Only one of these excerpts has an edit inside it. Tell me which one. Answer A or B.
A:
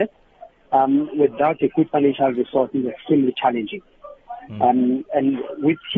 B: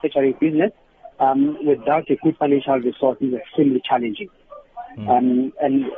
B